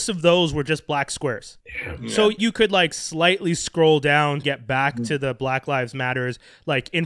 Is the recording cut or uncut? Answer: cut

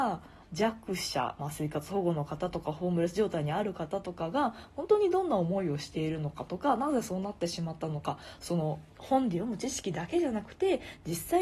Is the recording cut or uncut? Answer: cut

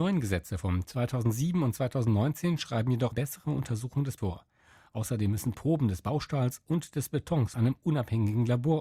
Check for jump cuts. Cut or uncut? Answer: cut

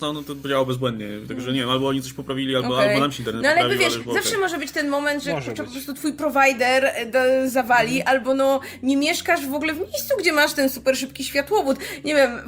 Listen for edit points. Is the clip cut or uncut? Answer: uncut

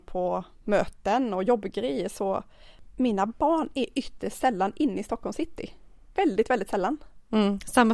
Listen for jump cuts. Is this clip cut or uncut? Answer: uncut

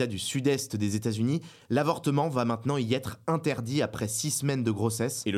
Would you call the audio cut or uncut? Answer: uncut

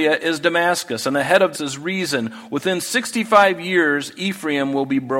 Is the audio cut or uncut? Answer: cut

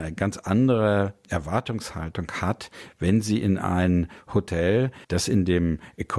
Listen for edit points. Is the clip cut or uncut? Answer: cut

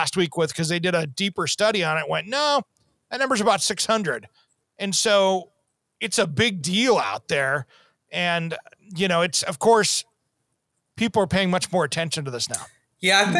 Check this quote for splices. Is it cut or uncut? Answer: uncut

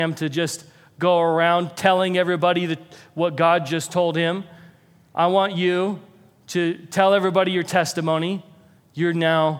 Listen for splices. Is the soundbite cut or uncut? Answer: uncut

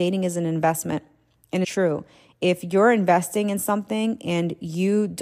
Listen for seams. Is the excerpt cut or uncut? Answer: cut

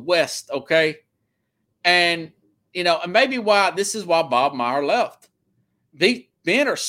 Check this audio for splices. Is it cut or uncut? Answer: uncut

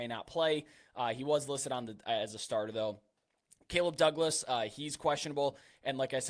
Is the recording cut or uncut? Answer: uncut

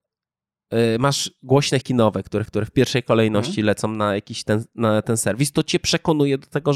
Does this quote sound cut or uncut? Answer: cut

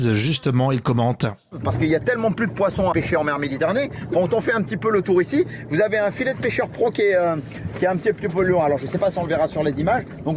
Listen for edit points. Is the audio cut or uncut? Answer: cut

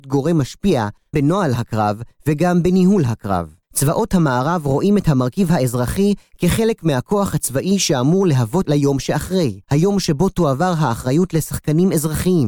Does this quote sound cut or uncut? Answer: cut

